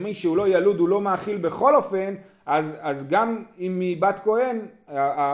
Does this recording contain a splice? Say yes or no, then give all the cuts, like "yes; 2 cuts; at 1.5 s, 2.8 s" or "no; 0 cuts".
no; 0 cuts